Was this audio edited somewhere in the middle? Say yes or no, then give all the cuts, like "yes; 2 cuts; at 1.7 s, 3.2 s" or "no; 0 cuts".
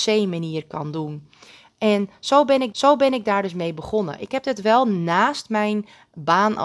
yes; 1 cut; at 2.7 s